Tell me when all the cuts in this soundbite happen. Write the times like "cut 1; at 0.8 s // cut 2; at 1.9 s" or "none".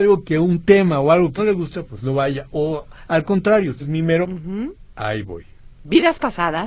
cut 1; at 1.4 s // cut 2; at 3.8 s // cut 3; at 4.2 s